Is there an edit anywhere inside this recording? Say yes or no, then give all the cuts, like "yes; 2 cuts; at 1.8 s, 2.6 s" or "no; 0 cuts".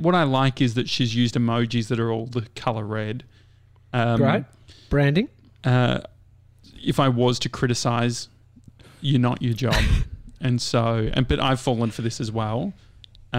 no; 0 cuts